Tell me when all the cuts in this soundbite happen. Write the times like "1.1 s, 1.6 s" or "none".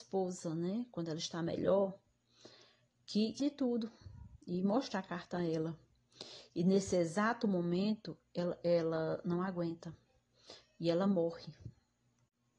3.4 s